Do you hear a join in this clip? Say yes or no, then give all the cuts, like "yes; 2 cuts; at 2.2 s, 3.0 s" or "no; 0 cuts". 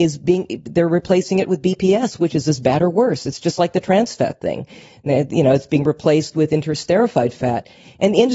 no; 0 cuts